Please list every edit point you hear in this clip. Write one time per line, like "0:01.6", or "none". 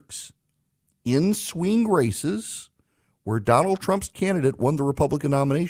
none